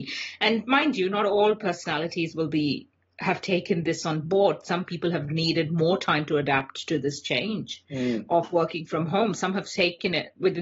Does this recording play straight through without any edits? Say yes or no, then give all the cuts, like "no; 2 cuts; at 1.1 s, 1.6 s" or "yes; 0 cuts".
yes; 0 cuts